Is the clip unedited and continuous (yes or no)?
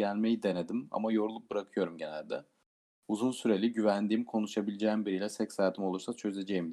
yes